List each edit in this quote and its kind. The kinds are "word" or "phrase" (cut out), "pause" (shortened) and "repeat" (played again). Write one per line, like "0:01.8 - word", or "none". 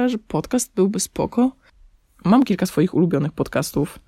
none